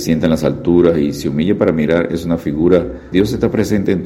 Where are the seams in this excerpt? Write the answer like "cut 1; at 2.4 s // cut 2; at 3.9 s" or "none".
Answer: cut 1; at 3.1 s